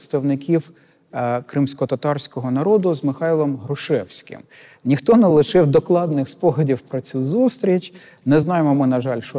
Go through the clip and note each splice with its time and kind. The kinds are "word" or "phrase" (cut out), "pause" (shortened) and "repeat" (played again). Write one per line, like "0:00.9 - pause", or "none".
none